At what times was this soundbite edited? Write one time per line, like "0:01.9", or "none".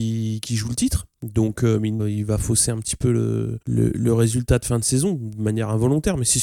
0:02.0
0:03.6